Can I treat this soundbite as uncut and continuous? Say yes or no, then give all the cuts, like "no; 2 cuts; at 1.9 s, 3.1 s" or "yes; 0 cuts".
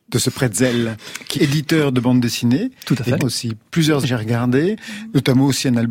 no; 3 cuts; at 1.3 s, 3.2 s, 4.0 s